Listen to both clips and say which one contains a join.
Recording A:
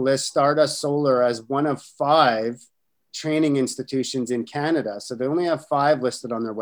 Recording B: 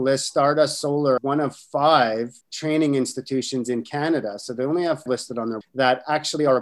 B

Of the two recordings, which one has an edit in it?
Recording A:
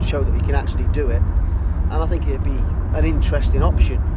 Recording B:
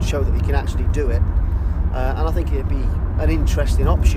A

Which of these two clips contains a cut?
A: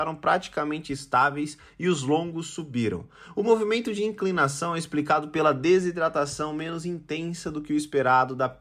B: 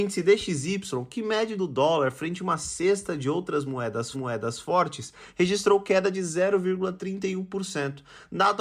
B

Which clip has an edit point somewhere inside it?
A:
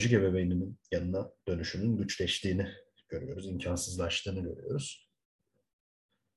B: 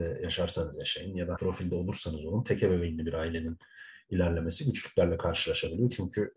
B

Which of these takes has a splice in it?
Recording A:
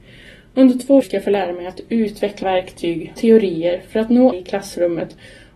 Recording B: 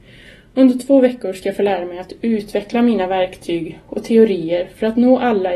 A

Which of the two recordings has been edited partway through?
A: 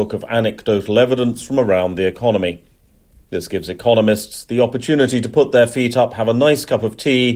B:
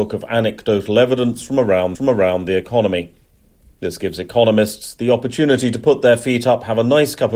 B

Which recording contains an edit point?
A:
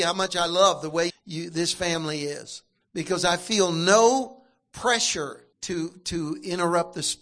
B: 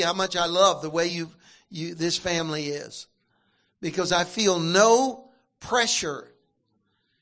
A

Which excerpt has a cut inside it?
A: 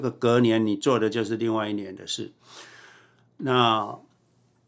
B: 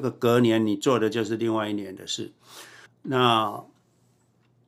B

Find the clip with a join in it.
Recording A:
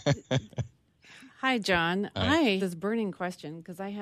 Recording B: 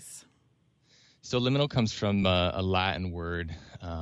A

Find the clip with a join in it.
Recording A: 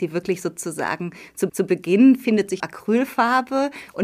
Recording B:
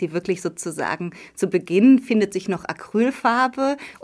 A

